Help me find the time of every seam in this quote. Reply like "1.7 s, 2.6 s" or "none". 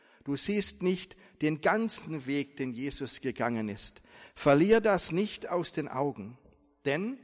none